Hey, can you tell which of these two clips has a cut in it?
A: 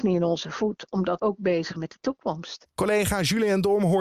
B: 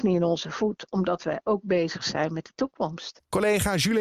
A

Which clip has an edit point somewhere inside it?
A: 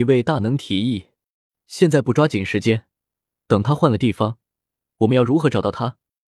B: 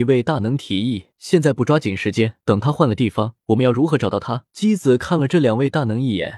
B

